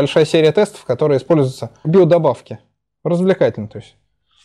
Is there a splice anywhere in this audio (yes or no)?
yes